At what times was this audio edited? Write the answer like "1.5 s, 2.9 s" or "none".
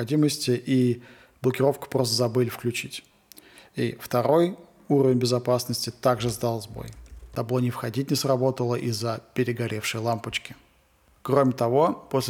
none